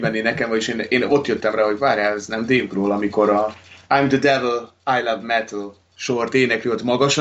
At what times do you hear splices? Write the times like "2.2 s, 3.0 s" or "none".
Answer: 3.8 s, 5.8 s